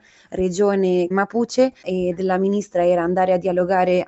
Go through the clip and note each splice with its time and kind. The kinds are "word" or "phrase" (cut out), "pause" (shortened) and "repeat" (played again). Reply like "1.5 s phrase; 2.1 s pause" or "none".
1.1 s phrase; 1.8 s word